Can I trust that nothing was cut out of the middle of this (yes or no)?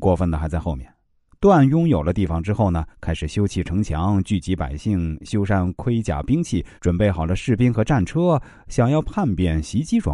no